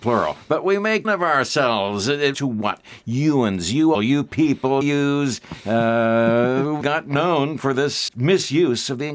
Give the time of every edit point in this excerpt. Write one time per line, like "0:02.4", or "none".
0:01.0
0:02.3
0:03.9
0:04.8
0:06.8
0:08.1